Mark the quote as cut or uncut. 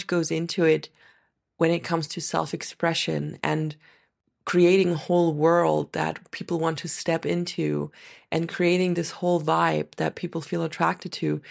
uncut